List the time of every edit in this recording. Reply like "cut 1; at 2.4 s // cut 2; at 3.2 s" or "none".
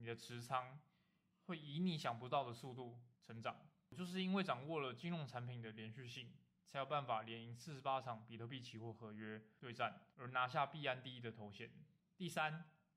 cut 1; at 3.1 s // cut 2; at 10.1 s

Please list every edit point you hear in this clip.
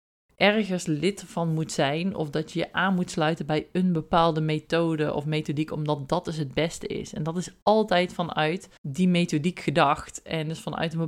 cut 1; at 8.8 s

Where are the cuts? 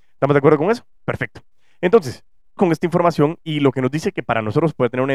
cut 1; at 2.6 s

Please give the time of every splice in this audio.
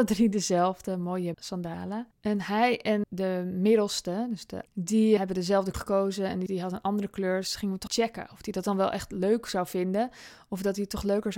cut 1; at 1.3 s // cut 2; at 2.1 s // cut 3; at 3.0 s // cut 4; at 4.7 s // cut 5; at 5.2 s // cut 6; at 5.7 s // cut 7; at 6.5 s // cut 8; at 7.9 s

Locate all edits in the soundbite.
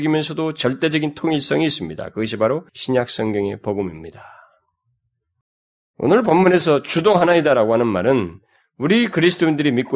cut 1; at 2.7 s

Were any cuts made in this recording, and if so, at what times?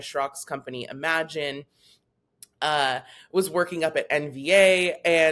none

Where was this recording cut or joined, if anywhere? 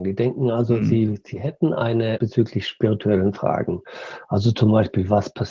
cut 1; at 2.2 s

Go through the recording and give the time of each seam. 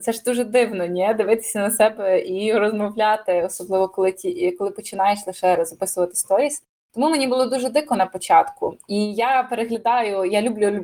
none

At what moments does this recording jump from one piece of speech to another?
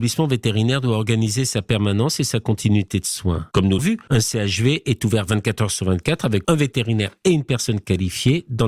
cut 1; at 3.8 s // cut 2; at 6.4 s

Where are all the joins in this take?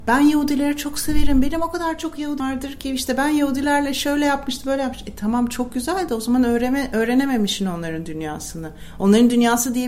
cut 1; at 2.4 s

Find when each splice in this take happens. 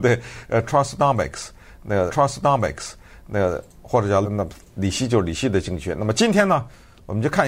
cut 1; at 2.1 s // cut 2; at 4.2 s

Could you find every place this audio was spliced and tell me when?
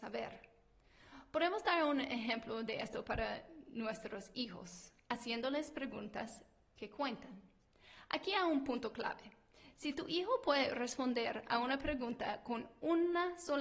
none

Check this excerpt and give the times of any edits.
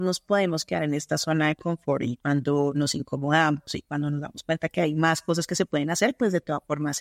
none

